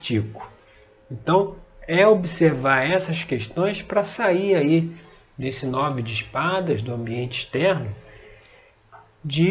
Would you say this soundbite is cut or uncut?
uncut